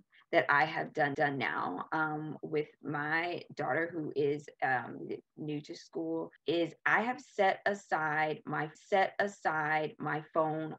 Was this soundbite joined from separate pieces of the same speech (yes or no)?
yes